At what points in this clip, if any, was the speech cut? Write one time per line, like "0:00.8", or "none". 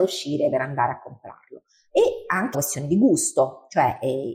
0:02.5